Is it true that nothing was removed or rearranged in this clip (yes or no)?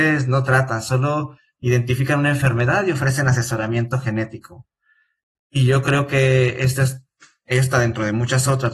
yes